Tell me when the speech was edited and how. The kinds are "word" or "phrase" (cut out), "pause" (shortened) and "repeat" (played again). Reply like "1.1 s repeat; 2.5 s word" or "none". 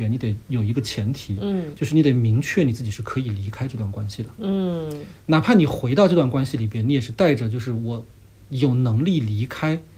none